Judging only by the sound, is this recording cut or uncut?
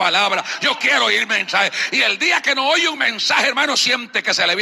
uncut